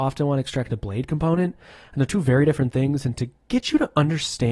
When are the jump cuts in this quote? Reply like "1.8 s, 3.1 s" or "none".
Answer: none

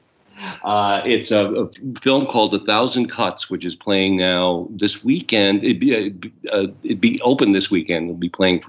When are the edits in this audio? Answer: none

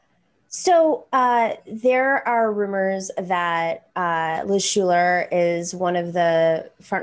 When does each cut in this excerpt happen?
none

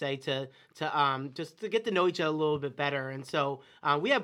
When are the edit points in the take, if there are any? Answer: none

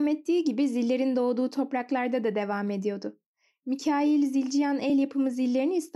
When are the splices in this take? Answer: none

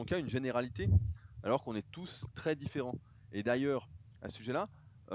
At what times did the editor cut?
none

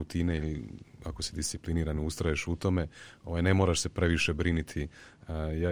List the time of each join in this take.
none

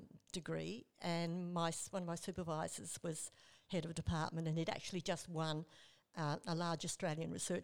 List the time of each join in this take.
none

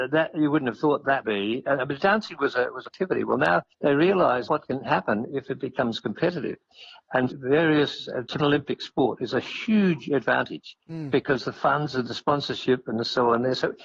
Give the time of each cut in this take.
1.2 s, 2.9 s, 3.7 s, 4.5 s, 7.3 s, 8.4 s

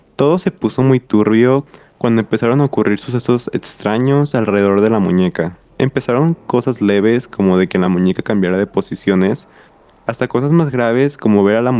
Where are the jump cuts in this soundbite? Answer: none

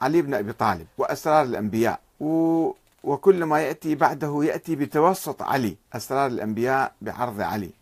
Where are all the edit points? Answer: 0.9 s, 2.1 s, 5.8 s

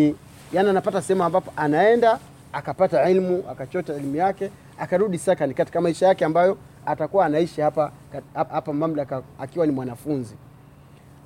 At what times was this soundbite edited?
6.8 s, 8.5 s

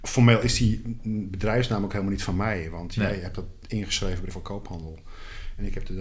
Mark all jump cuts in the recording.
4.3 s

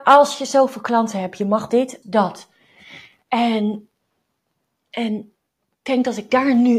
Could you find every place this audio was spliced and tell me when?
1.7 s, 2.0 s, 5.8 s

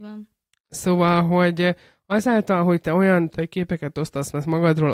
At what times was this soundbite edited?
3.3 s

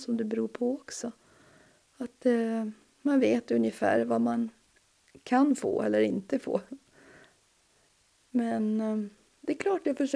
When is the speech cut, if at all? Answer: none

